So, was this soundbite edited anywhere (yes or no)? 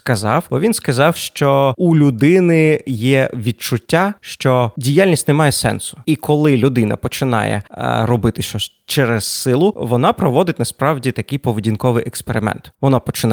yes